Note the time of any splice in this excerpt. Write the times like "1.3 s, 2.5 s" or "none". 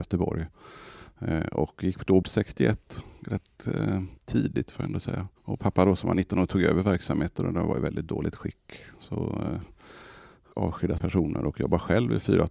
2.2 s, 4.2 s, 5.4 s, 10.5 s, 11.0 s